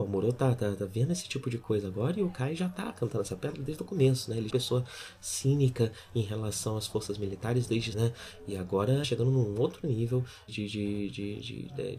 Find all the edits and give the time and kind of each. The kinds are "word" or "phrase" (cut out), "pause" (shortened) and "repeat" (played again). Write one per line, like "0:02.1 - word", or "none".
0:04.5 - phrase
0:07.9 - word
0:09.0 - phrase
0:10.5 - word